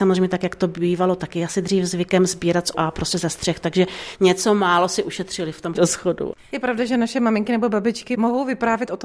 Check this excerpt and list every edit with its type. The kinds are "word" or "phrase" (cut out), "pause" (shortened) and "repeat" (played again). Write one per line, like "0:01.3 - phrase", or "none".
0:02.7 - word
0:05.7 - word

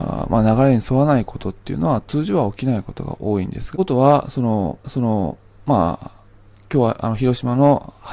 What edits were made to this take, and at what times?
0:04.8 - repeat

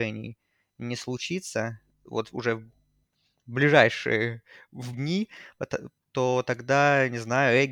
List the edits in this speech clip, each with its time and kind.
0:04.9 - word
0:06.0 - word

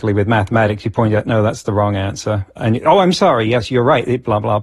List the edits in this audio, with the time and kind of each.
none

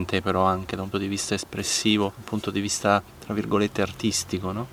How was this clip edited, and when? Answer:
0:00.9 - word
0:02.1 - word
0:03.1 - pause

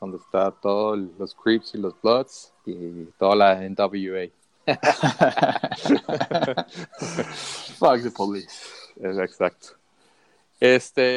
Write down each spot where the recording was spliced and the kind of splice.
0:02.6 - pause

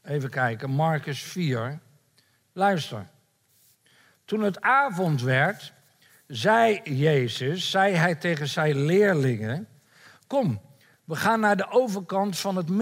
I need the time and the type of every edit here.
none

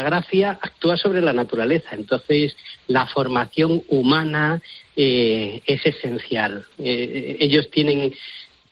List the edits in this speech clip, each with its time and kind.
none

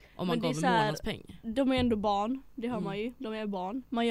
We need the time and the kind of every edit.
none

